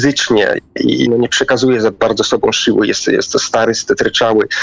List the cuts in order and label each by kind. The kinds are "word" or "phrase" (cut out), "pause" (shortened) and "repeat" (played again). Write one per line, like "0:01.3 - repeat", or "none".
0:01.1 - word